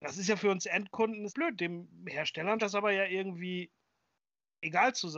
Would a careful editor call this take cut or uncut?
cut